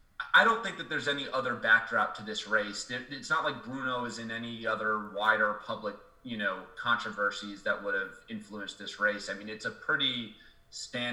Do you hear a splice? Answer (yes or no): no